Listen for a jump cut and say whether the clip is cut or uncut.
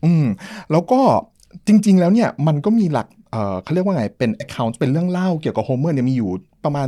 uncut